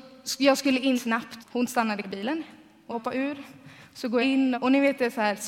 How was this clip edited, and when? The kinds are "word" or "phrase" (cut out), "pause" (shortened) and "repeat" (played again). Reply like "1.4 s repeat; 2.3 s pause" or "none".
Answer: 0.9 s word; 1.4 s word; 2.0 s word; 2.9 s word; 4.2 s word; 4.5 s word